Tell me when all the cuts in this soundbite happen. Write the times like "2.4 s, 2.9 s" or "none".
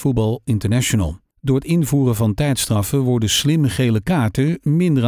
none